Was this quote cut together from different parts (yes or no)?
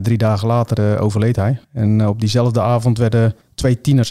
yes